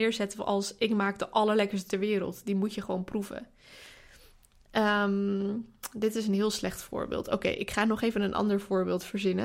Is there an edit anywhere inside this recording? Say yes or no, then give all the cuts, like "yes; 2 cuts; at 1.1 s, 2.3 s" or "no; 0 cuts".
yes; 1 cut; at 1.9 s